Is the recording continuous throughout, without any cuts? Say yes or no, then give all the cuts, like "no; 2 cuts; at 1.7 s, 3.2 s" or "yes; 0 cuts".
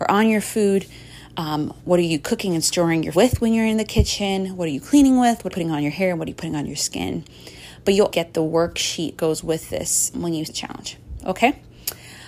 no; 7 cuts; at 1.8 s, 3.1 s, 5.5 s, 8.1 s, 9.2 s, 10.1 s, 10.5 s